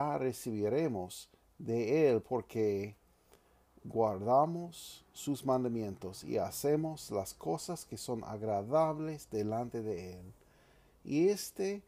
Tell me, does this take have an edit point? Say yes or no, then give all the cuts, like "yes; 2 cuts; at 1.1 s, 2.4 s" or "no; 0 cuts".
no; 0 cuts